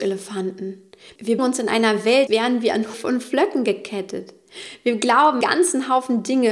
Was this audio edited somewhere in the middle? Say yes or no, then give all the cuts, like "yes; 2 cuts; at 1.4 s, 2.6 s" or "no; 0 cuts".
yes; 4 cuts; at 1.4 s, 2.3 s, 2.9 s, 5.4 s